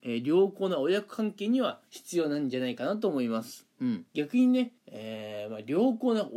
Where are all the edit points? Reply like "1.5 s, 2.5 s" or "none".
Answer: 1.9 s, 3.7 s, 4.1 s, 4.8 s